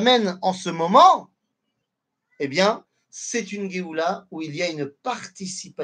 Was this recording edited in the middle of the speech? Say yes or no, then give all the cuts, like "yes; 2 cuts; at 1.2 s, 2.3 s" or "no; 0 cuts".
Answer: no; 0 cuts